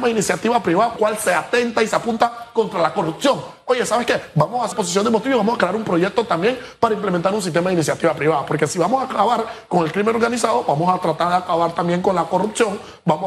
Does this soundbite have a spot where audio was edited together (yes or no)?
yes